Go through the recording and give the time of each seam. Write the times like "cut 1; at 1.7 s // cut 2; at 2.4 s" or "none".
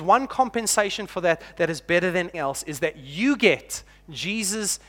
cut 1; at 2.3 s

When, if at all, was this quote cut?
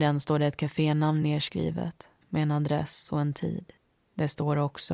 none

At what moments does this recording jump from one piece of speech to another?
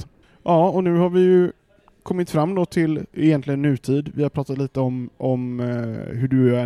none

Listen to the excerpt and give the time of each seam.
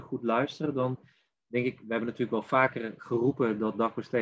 none

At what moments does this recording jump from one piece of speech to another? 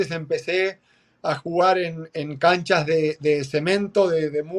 none

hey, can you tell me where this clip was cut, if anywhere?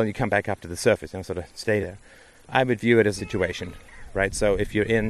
cut 1; at 1.8 s // cut 2; at 3.2 s

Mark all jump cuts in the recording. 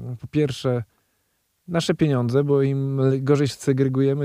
none

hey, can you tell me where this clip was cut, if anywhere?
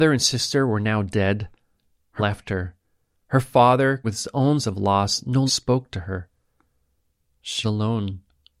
cut 1; at 2.2 s // cut 2; at 4.0 s // cut 3; at 4.6 s // cut 4; at 5.5 s // cut 5; at 7.6 s

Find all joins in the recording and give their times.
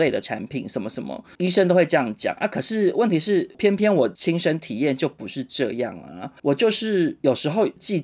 cut 1; at 6.4 s

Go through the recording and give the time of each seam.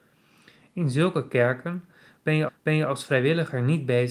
cut 1; at 2.5 s

